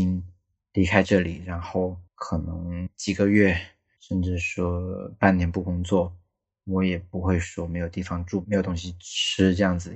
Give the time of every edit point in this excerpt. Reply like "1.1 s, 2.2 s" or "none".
2.1 s